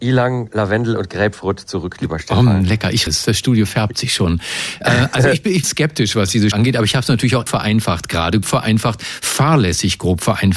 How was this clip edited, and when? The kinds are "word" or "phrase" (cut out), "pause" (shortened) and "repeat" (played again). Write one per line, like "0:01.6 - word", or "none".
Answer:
0:03.1 - word
0:05.6 - word
0:06.5 - word
0:07.5 - word
0:08.4 - word

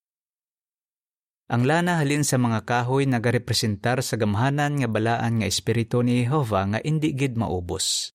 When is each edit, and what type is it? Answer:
none

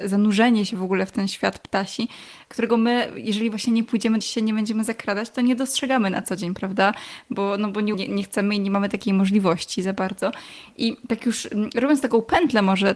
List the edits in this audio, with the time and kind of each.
0:04.2 - phrase
0:07.9 - word

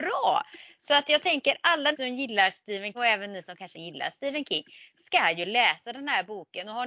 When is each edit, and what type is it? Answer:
0:01.9 - word
0:02.9 - word
0:03.7 - word

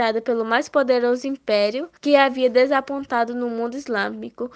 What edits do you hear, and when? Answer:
0:02.0 - pause

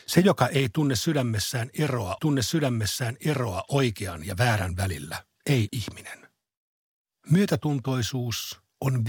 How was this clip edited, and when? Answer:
0:02.2 - repeat
0:05.7 - word

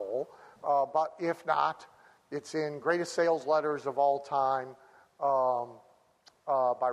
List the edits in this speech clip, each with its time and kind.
none

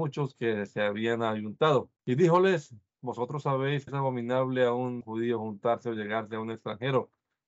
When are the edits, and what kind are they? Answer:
0:02.0 - pause
0:03.9 - word
0:05.0 - word

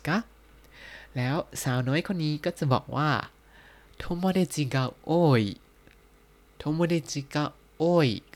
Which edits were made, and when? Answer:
none

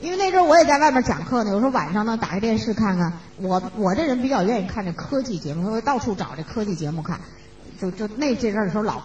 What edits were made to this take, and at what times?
0:03.3 - pause

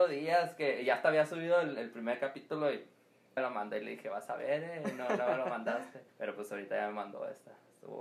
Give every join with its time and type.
0:03.4 - word
0:06.1 - pause

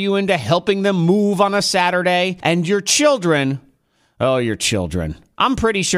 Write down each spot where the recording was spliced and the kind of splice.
none

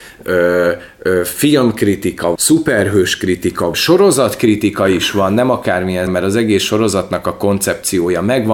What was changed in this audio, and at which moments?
0:02.4 - word
0:03.7 - word
0:06.1 - word

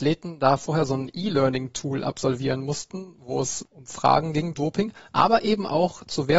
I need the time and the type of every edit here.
0:04.5 - word

